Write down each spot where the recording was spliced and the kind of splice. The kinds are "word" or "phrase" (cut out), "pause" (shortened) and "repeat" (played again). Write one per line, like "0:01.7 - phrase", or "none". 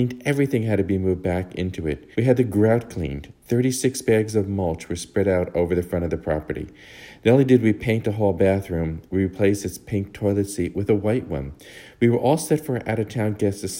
0:02.1 - pause

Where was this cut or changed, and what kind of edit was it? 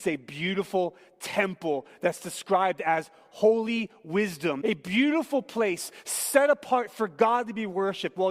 0:04.6 - word

